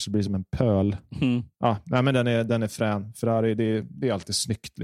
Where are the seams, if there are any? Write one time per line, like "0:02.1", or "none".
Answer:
0:01.5